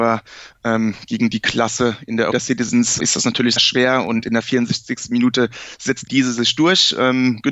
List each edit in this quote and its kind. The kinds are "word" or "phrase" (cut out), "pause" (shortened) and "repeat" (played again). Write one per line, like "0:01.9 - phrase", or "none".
0:02.3 - word
0:03.0 - word
0:03.6 - word
0:06.1 - word